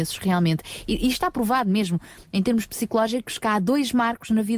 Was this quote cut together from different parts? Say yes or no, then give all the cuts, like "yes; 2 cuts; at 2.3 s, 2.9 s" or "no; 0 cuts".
no; 0 cuts